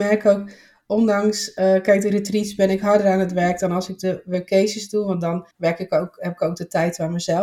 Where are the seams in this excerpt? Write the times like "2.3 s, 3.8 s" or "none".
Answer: 5.5 s